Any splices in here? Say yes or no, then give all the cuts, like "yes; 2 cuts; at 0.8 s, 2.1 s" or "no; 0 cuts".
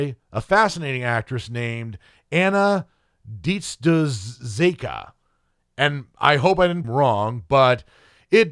yes; 1 cut; at 6.8 s